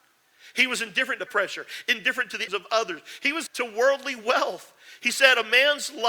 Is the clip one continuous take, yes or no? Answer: no